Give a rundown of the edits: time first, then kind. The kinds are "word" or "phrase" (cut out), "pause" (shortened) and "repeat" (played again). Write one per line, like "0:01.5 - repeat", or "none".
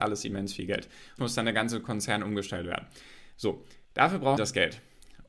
0:01.2 - word
0:03.8 - pause
0:04.4 - word